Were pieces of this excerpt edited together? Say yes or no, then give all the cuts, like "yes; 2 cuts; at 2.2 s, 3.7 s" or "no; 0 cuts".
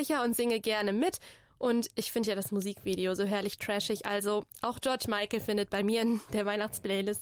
no; 0 cuts